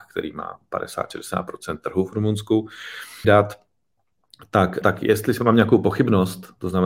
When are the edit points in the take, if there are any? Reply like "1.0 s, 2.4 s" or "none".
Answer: 3.2 s, 4.8 s